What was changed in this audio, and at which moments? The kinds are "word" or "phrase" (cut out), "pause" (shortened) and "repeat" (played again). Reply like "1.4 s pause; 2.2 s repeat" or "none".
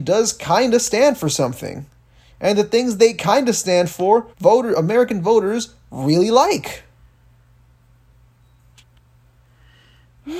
4.3 s pause